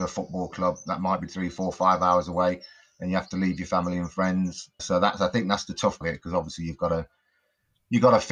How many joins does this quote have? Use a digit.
3